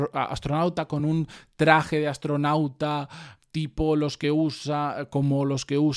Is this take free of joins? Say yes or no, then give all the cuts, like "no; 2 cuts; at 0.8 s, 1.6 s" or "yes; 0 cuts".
yes; 0 cuts